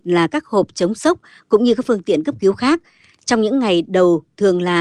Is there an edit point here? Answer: no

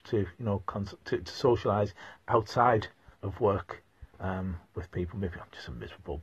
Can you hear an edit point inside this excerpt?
yes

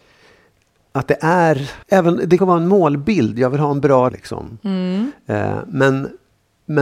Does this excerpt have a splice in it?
yes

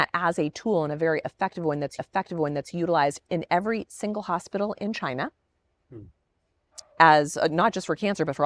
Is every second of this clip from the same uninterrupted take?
no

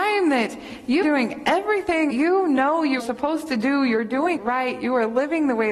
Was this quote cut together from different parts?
yes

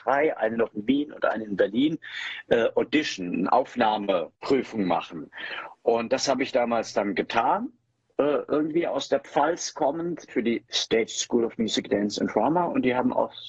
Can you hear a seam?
no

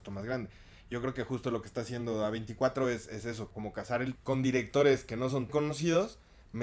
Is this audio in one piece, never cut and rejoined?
no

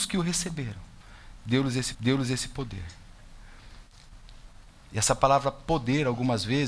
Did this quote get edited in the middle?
yes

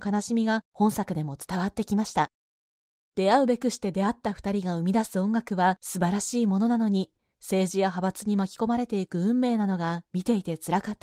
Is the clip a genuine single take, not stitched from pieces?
yes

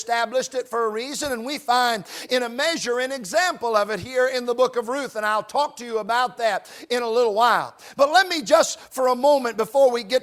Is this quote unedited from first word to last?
yes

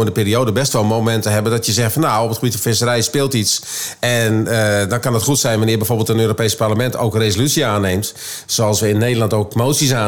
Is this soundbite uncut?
yes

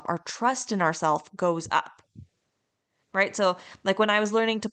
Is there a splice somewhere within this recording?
no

